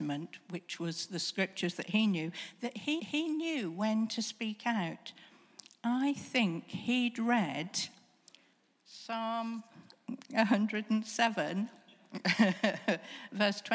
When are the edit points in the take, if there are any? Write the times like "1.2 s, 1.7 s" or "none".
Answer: 3.0 s

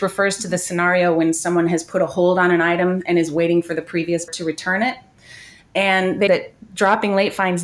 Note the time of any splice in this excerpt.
4.3 s, 6.3 s

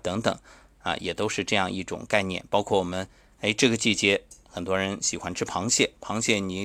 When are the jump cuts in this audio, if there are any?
none

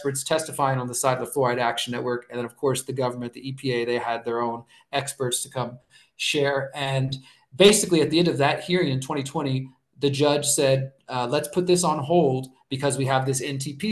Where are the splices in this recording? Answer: none

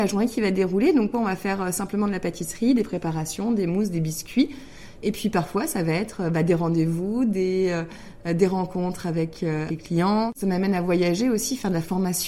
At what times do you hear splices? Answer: 1.1 s, 9.7 s

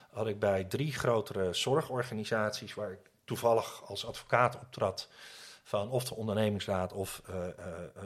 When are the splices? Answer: none

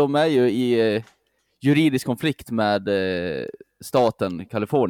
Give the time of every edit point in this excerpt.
none

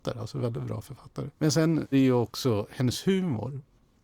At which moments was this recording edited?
1.4 s, 1.9 s

